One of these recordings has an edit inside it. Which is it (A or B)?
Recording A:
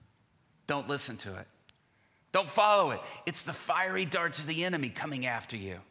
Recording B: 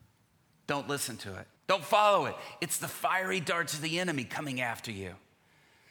B